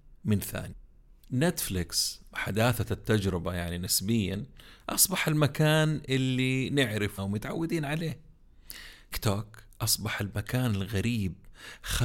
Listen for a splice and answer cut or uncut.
cut